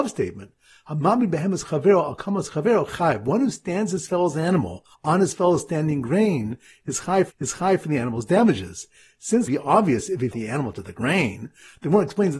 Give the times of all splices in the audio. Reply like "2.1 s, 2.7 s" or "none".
4.9 s, 7.3 s, 9.5 s, 10.3 s